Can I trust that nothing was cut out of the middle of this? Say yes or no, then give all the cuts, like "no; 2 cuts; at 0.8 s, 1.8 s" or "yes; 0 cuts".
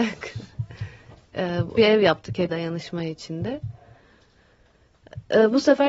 no; 2 cuts; at 1.8 s, 2.5 s